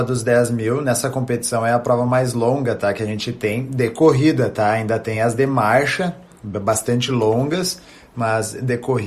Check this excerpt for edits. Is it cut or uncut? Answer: uncut